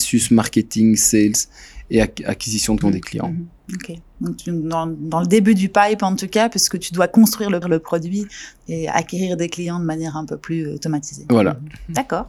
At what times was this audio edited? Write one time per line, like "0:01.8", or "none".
0:02.8
0:07.6